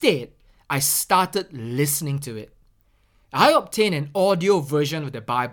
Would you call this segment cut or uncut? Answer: uncut